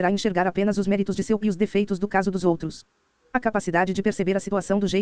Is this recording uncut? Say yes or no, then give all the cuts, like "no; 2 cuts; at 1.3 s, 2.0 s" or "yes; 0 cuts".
no; 1 cut; at 1.4 s